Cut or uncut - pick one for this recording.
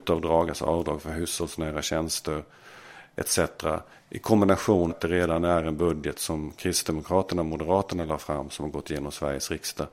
cut